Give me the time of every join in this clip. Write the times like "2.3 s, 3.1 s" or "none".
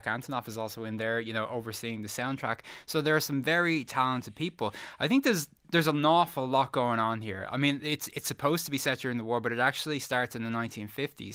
none